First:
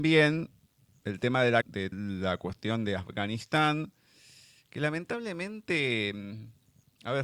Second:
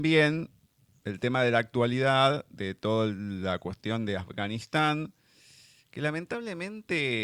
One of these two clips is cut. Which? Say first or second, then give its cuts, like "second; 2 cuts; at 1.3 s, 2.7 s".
first; 2 cuts; at 1.6 s, 1.9 s